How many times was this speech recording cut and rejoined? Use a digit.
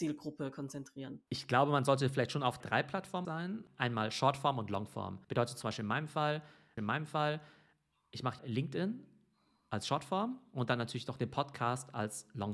5